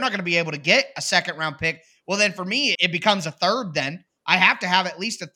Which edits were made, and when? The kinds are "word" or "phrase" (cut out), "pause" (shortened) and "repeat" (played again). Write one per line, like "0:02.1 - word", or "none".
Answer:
0:02.7 - word